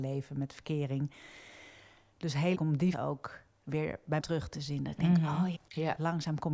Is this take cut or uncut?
cut